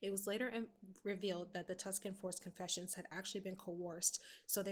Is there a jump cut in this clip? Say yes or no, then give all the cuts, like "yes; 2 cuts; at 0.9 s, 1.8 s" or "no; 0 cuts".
no; 0 cuts